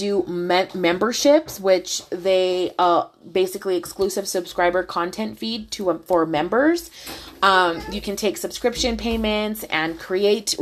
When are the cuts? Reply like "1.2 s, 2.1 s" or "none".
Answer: none